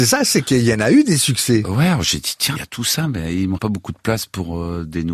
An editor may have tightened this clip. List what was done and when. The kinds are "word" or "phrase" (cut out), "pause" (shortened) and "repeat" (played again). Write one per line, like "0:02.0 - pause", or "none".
0:02.5 - word
0:03.6 - word